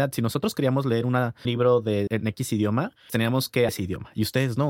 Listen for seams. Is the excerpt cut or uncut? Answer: cut